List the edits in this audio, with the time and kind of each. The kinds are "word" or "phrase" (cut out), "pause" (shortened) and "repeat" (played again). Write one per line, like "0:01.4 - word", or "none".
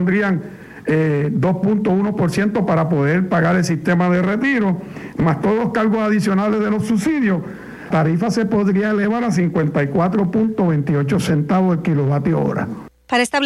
0:07.9 - word